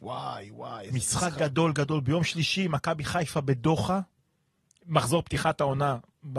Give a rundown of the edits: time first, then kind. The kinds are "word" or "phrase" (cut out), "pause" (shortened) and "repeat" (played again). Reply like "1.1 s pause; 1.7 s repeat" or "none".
none